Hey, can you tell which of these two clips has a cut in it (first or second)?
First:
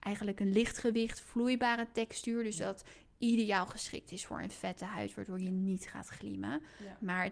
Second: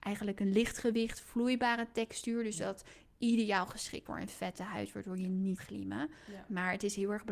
second